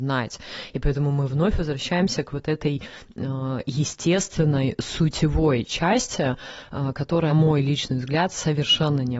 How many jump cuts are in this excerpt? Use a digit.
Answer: 1